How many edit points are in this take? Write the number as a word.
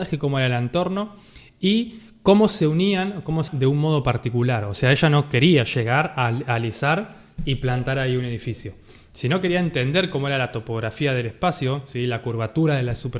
one